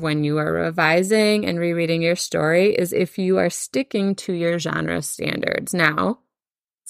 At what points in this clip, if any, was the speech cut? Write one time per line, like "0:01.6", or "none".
none